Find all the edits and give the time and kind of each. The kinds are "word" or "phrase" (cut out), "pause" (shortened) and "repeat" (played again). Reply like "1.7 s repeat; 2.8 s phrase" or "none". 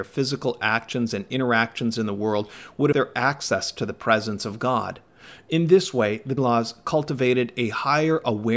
2.9 s word; 6.4 s word